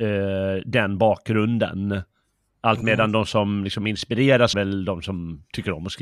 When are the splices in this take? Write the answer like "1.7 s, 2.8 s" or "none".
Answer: 4.5 s

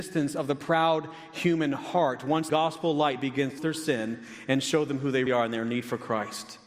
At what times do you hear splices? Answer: 2.5 s, 3.6 s, 5.3 s

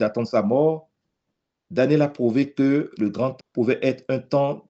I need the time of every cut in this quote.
3.4 s

